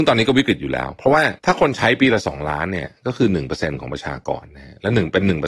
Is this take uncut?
no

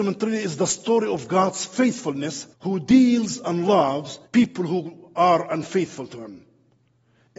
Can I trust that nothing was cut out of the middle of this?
no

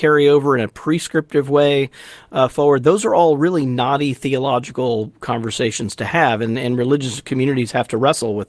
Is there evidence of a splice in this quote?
no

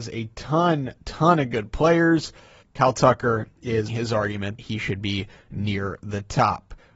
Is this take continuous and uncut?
no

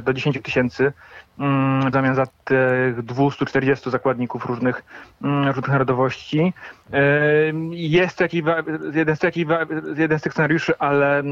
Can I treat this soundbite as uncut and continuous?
no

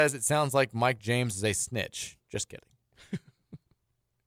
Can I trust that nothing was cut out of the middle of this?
yes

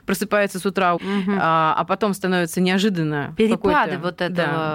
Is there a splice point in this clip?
yes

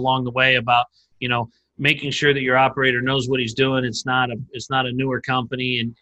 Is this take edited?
no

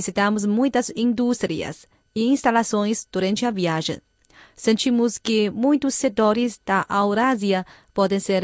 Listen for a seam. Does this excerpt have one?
no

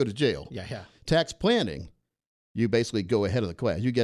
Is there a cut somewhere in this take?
no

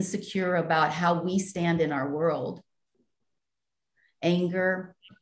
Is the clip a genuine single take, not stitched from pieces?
yes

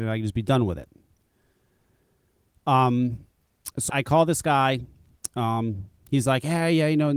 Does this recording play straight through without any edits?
no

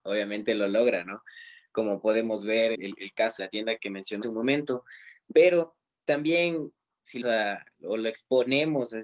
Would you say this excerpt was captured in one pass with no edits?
no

